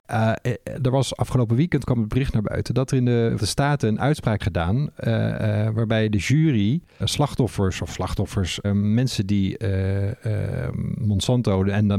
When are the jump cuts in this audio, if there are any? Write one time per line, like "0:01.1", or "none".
0:03.4
0:04.4
0:07.0
0:08.6

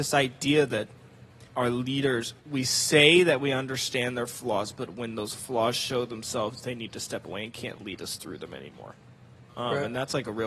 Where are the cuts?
0:01.5

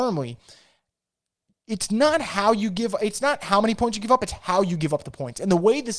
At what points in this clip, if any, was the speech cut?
none

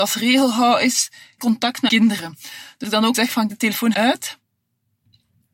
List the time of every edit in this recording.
0:01.4
0:01.9
0:02.8
0:03.1
0:03.5
0:03.9

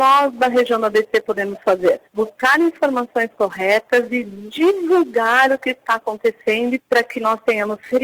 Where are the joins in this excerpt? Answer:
0:02.1
0:06.8

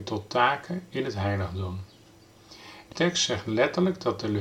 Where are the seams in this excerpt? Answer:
0:02.9

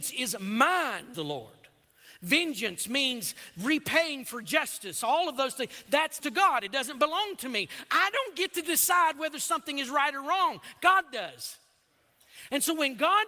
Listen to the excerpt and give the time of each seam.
0:01.1
0:06.2

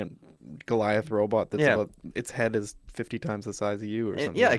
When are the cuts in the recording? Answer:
none

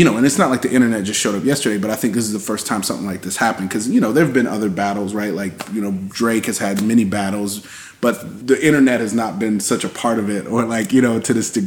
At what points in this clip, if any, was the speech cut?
none

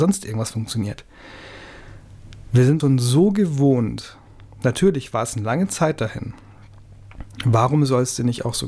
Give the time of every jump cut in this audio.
0:02.8

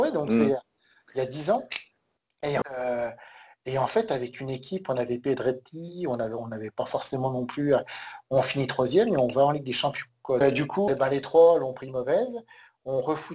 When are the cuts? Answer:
0:02.6
0:10.4
0:10.9

